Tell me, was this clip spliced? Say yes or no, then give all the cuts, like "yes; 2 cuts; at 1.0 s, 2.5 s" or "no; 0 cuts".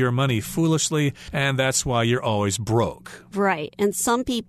no; 0 cuts